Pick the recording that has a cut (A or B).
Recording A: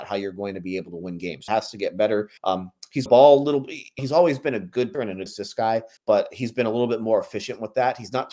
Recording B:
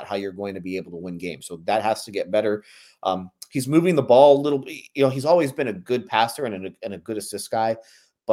A